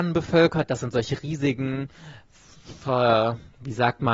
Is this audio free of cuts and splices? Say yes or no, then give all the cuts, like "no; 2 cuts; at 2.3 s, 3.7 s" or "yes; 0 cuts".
yes; 0 cuts